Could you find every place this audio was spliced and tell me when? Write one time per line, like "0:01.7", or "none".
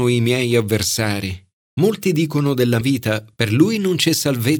0:02.8